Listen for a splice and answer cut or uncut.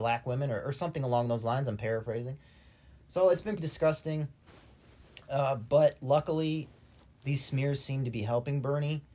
cut